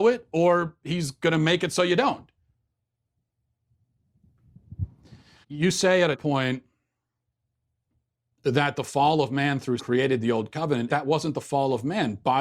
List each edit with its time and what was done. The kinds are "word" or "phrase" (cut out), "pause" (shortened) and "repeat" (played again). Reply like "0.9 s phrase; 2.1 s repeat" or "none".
5.4 s word; 6.1 s word; 9.8 s word; 10.9 s word